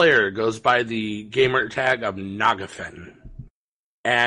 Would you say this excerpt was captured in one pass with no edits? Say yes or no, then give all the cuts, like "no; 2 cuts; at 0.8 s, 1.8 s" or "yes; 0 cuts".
yes; 0 cuts